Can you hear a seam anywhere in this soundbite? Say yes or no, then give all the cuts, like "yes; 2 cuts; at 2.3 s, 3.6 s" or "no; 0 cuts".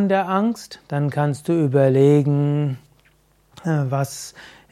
no; 0 cuts